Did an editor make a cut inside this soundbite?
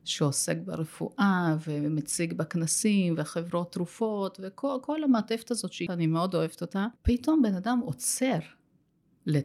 yes; 2 cuts; at 5.9 s, 7.0 s

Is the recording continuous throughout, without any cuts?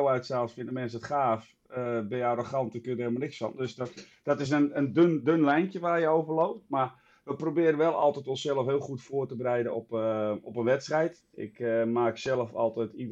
yes; 0 cuts

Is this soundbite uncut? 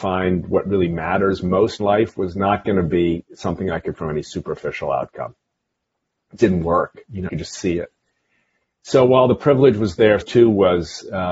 no; 5 cuts; at 1.8 s, 3.9 s, 6.4 s, 7.3 s, 10.2 s

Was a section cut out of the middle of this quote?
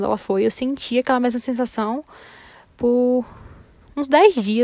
no; 0 cuts

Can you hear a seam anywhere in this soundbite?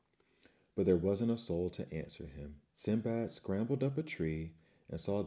yes; 1 cut; at 2.7 s

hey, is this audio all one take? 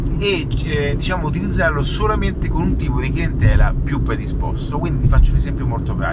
yes; 0 cuts

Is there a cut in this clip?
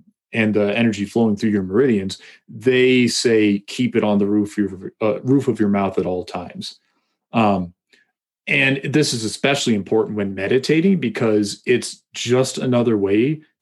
no; 0 cuts

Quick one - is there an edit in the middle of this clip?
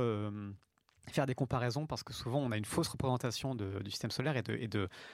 no; 0 cuts

